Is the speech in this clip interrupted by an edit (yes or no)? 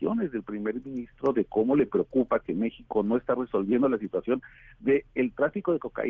no